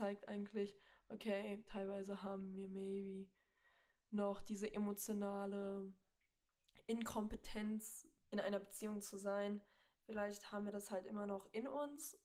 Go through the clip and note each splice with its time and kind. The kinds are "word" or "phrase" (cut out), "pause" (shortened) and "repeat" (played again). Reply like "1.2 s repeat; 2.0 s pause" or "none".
none